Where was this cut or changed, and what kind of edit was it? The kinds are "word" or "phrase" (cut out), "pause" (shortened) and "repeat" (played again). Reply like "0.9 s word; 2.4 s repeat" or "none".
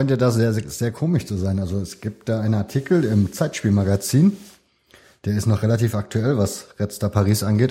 none